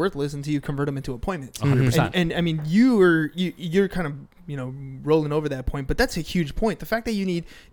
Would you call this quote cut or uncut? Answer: uncut